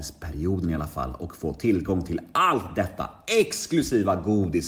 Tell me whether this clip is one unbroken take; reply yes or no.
yes